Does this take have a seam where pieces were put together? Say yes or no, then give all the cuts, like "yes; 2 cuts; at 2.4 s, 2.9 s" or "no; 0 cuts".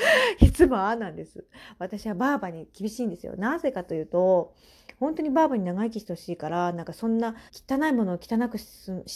yes; 1 cut; at 7.5 s